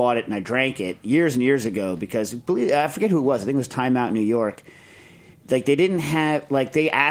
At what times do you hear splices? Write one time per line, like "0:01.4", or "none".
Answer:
none